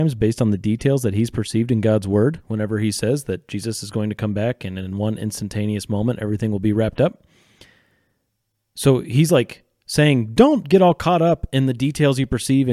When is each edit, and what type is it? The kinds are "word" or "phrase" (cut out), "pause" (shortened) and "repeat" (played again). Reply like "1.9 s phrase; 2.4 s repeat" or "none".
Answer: none

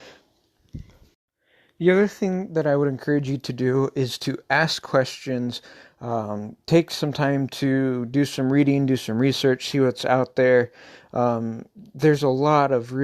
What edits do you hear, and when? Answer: none

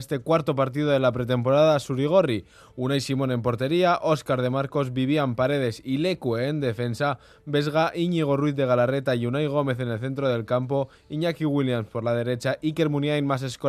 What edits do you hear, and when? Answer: none

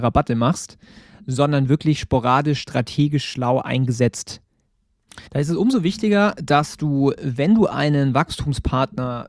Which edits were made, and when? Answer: 5.3 s pause

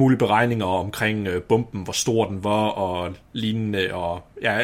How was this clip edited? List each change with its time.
none

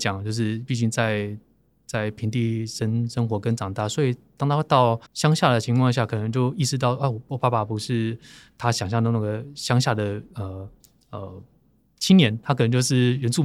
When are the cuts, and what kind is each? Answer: 5.1 s pause

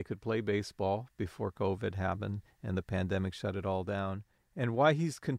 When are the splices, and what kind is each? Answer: none

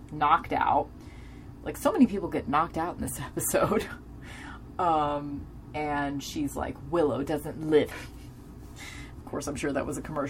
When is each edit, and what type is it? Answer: 7.9 s phrase

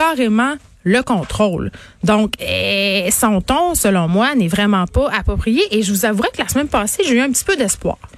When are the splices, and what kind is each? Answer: none

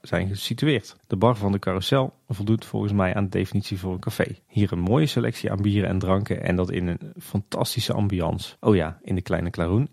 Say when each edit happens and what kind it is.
1.0 s pause; 4.4 s pause; 8.6 s pause

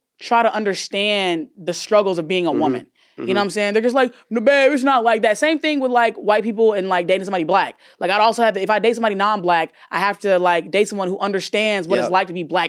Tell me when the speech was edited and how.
none

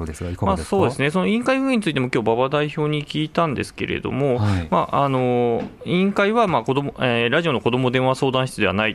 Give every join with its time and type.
none

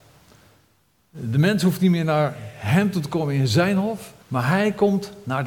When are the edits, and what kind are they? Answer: 4.2 s pause

